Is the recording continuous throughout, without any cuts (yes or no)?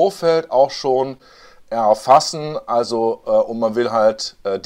yes